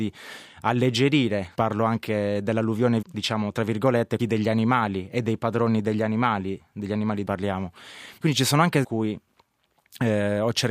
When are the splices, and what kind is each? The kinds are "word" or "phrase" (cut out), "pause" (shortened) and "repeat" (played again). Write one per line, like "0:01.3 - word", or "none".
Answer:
0:01.5 - word
0:03.0 - word
0:04.2 - phrase
0:07.3 - word
0:08.2 - pause
0:08.8 - phrase